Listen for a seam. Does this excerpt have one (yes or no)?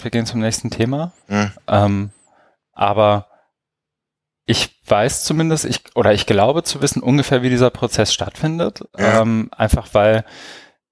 yes